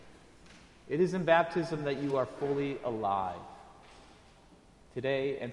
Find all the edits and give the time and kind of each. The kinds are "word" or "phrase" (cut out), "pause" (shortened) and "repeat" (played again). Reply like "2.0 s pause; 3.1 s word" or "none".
none